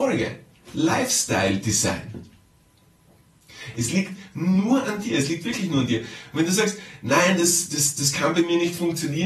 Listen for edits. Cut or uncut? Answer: uncut